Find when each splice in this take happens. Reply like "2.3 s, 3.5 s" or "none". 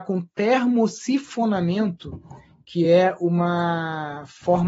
none